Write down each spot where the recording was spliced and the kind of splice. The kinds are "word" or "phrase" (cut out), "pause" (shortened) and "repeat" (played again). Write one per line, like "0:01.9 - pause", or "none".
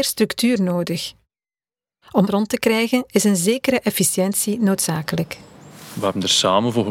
0:02.3 - word